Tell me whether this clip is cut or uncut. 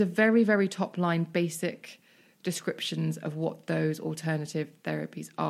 uncut